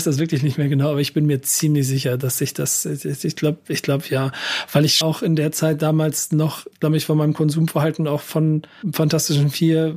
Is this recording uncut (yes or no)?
no